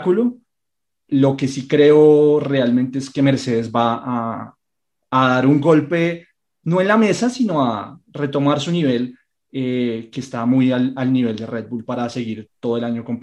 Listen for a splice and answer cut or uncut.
uncut